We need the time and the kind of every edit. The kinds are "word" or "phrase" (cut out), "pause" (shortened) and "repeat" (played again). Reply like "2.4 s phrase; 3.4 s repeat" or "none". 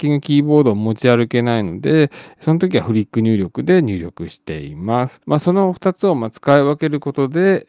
5.2 s pause